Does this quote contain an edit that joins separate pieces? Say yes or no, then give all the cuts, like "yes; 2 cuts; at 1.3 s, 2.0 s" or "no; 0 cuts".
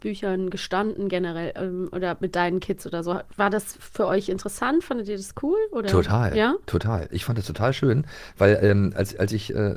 no; 0 cuts